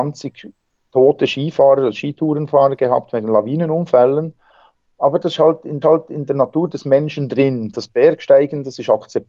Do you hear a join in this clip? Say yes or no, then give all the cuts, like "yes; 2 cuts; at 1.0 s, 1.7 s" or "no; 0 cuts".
yes; 1 cut; at 5.8 s